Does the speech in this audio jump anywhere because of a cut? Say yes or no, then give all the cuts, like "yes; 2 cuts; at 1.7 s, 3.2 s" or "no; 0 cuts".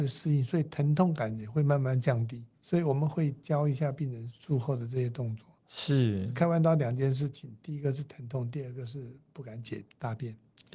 yes; 1 cut; at 2.5 s